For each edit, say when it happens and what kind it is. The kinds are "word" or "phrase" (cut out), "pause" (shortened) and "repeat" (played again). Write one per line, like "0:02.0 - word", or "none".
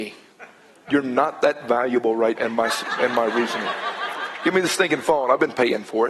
0:02.3 - word